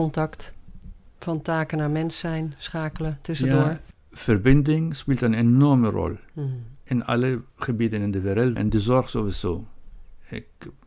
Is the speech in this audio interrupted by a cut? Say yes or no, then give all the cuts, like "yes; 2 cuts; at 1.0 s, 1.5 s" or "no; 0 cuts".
yes; 1 cut; at 8.6 s